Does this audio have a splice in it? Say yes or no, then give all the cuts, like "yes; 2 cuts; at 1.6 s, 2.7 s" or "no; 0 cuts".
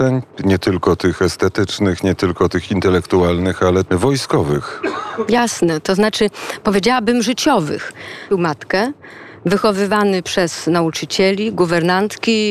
yes; 2 cuts; at 3.9 s, 8.3 s